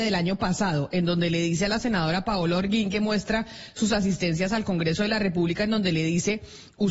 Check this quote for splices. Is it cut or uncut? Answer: uncut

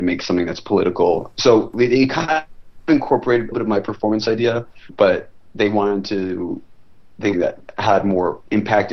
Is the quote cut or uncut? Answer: cut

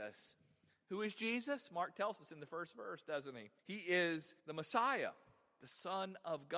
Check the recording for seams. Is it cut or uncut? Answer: cut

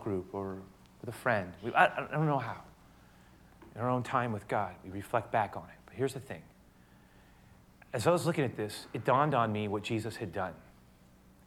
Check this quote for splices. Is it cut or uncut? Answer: uncut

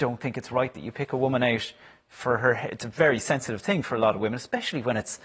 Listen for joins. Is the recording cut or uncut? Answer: uncut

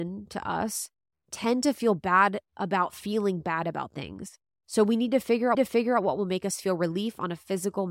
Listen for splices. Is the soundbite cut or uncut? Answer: cut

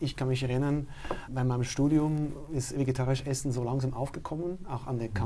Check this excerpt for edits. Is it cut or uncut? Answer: cut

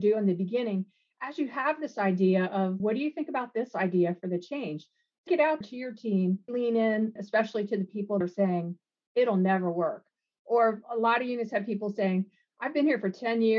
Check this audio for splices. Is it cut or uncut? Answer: cut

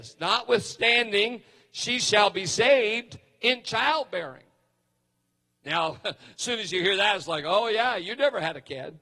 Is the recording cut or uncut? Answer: uncut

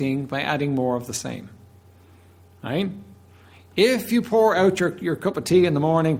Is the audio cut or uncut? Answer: uncut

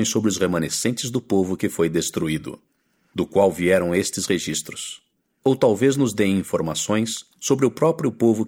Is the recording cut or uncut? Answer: cut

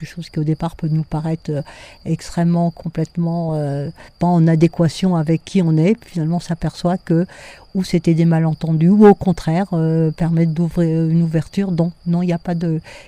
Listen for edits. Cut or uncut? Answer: uncut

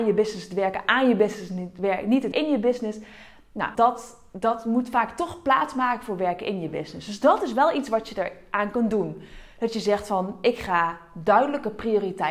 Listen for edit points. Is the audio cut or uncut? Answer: cut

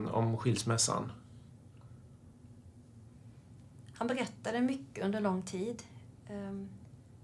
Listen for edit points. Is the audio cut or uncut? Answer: uncut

